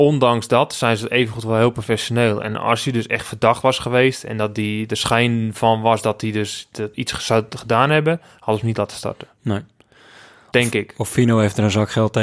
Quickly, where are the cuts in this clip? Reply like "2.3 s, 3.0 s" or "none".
none